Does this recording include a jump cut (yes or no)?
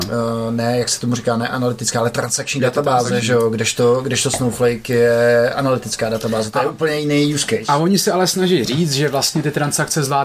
no